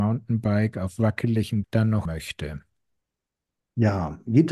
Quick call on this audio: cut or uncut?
cut